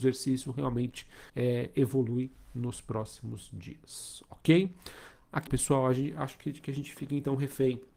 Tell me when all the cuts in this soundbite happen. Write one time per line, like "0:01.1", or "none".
0:01.3
0:05.5